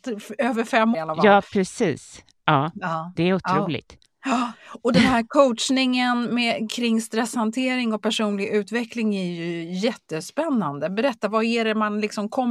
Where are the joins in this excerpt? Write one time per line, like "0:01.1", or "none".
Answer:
0:00.9